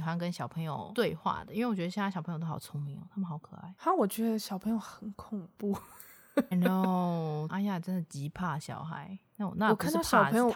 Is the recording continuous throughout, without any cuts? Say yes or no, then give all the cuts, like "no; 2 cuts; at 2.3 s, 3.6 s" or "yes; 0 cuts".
no; 2 cuts; at 6.5 s, 7.5 s